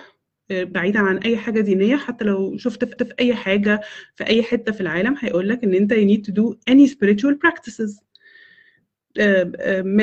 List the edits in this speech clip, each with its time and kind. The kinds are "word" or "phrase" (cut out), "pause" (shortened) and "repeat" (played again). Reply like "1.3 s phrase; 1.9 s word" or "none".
3.0 s repeat